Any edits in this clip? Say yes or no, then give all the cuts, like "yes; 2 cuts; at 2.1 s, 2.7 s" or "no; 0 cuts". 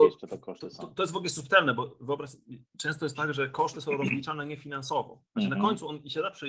yes; 1 cut; at 5.3 s